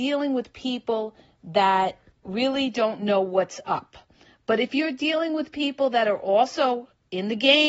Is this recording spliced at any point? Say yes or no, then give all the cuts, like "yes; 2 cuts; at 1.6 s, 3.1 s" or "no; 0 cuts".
no; 0 cuts